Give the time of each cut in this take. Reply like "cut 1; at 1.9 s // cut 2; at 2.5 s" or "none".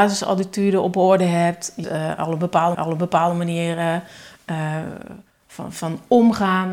cut 1; at 1.8 s // cut 2; at 2.7 s // cut 3; at 5.7 s